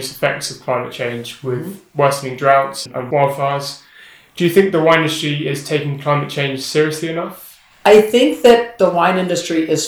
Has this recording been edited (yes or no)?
no